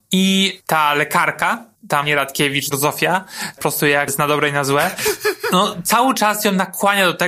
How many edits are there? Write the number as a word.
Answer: three